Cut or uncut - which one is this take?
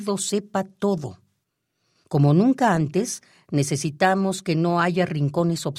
uncut